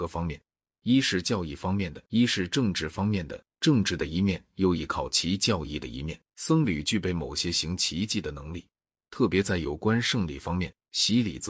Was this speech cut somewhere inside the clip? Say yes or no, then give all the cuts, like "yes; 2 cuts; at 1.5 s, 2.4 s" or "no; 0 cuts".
yes; 2 cuts; at 2.1 s, 6.3 s